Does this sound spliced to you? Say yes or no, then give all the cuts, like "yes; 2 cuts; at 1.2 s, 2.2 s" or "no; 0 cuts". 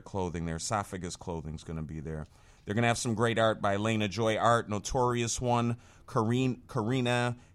no; 0 cuts